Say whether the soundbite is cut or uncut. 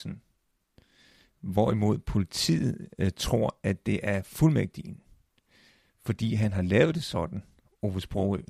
uncut